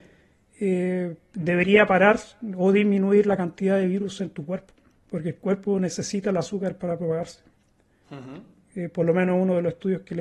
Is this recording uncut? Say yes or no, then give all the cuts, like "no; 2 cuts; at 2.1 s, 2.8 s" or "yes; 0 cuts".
yes; 0 cuts